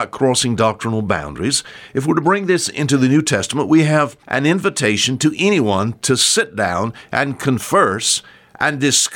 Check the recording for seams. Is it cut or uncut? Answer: cut